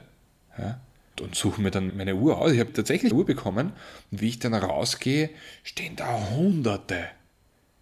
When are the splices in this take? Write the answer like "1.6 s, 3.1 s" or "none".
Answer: 1.2 s, 1.9 s, 2.7 s, 3.1 s